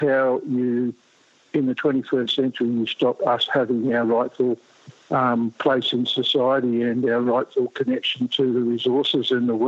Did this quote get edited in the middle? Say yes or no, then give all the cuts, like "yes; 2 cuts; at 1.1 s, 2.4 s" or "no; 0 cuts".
no; 0 cuts